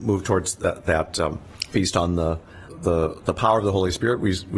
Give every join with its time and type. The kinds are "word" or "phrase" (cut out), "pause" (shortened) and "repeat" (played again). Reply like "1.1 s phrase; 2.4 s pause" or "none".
2.7 s word